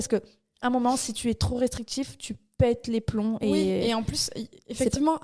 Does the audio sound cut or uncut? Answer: uncut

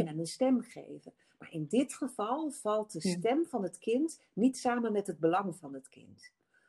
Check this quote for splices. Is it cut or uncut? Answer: uncut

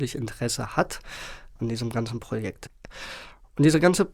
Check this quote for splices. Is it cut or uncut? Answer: cut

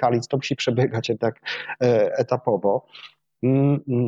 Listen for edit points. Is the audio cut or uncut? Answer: uncut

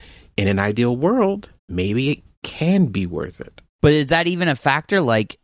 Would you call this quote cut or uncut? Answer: cut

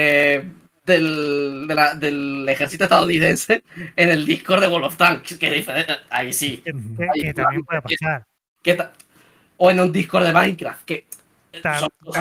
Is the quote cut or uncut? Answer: uncut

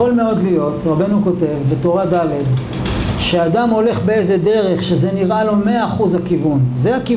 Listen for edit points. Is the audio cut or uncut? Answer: uncut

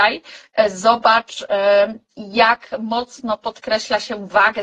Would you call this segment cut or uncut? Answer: uncut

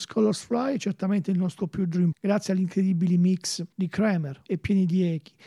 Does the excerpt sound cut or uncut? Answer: cut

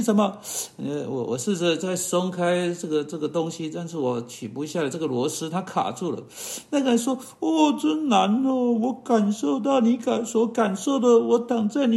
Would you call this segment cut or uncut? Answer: uncut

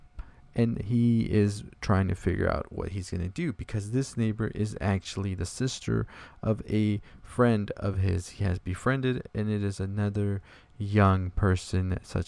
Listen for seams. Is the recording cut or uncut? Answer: uncut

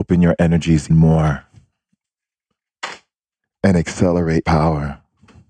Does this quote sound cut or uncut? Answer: cut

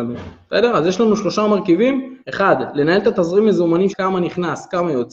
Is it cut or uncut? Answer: cut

